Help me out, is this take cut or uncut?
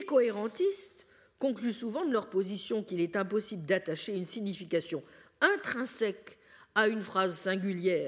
uncut